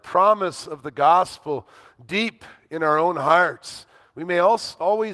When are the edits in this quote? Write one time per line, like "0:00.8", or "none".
none